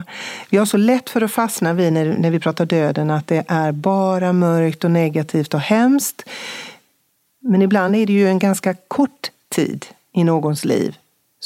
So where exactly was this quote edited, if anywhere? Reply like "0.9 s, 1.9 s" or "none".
none